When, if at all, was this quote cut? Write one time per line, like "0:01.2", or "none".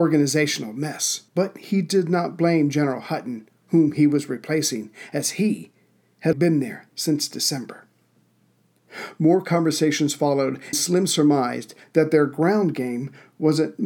0:01.3
0:06.3
0:10.7